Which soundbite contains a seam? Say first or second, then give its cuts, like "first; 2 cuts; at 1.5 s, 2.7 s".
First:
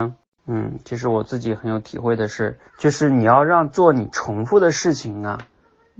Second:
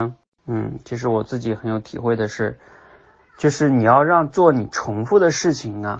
first; 1 cut; at 2.7 s